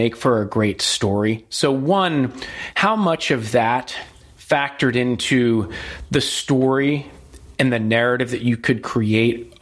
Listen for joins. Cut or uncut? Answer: uncut